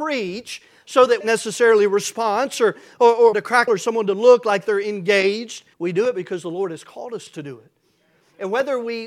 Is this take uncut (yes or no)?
no